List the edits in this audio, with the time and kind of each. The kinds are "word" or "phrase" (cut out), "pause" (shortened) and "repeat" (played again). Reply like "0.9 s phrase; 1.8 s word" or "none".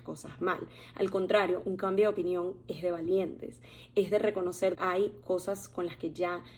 4.7 s word

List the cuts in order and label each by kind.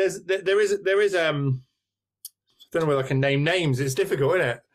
none

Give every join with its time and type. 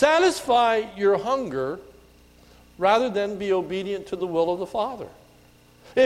none

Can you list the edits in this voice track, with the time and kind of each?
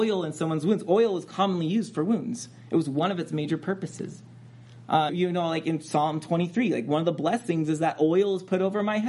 5.1 s word

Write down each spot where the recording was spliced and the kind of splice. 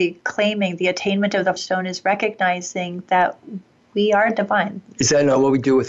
1.6 s word

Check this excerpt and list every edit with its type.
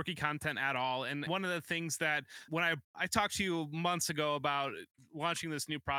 1.3 s word; 2.5 s word; 2.8 s pause

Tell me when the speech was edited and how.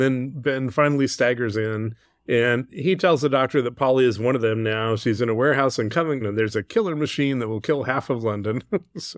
2.0 s pause; 6.2 s word

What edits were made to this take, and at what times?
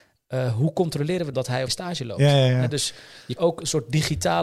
1.3 s word; 1.7 s word; 3.4 s word

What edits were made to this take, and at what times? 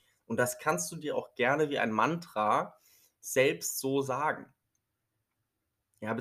none

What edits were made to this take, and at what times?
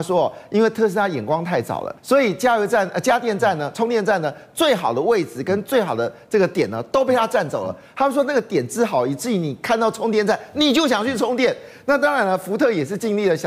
2.0 s pause

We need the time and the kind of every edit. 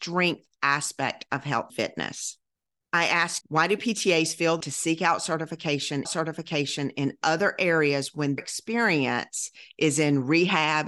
1.7 s word; 3.4 s word; 4.6 s word; 6.0 s repeat; 8.4 s word

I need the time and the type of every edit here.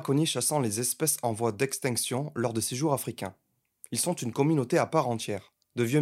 none

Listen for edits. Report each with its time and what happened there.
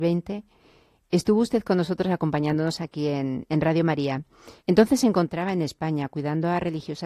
4.6 s pause

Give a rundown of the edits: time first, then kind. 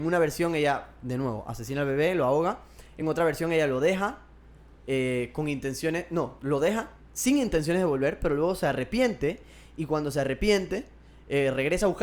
none

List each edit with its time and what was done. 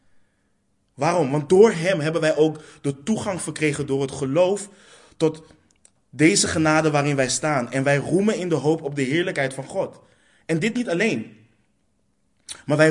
none

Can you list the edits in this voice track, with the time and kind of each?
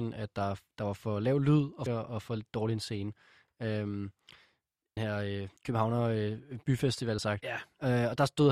1.9 s phrase; 5.0 s phrase; 5.6 s pause; 7.2 s phrase

